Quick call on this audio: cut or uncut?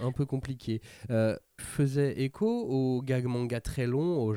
cut